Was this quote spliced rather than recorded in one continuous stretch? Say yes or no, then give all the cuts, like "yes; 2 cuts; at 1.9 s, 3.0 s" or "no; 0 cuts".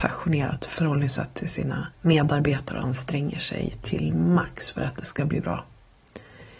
yes; 1 cut; at 1.9 s